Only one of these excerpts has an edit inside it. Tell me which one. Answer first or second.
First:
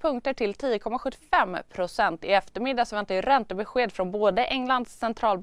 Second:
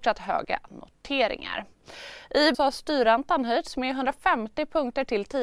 second